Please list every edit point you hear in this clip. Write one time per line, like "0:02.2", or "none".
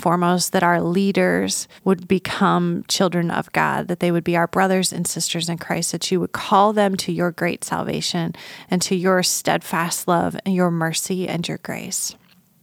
0:01.8